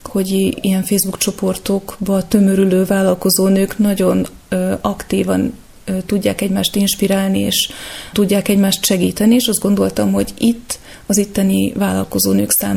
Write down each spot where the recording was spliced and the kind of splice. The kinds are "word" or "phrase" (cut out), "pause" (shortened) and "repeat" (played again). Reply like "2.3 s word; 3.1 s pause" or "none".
8.1 s word